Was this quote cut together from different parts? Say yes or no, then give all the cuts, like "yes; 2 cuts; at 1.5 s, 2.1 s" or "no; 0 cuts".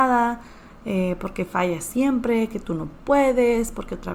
no; 0 cuts